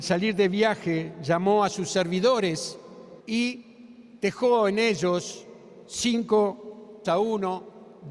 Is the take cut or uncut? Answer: cut